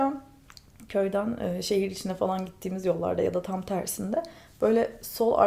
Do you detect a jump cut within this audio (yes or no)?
no